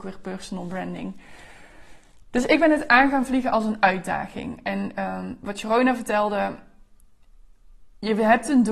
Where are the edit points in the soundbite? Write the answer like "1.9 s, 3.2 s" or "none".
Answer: none